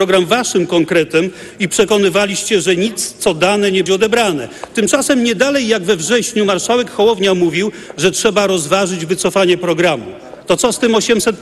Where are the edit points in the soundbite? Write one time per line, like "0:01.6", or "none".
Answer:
0:03.9